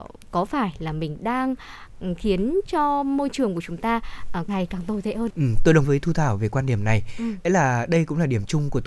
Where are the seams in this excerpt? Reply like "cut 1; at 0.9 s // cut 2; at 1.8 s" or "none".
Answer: cut 1; at 4.5 s // cut 2; at 5.3 s // cut 3; at 5.8 s // cut 4; at 7.4 s